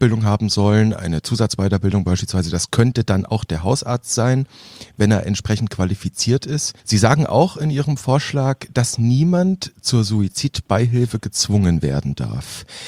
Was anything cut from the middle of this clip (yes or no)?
no